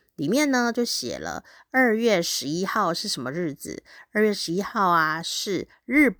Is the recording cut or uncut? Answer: uncut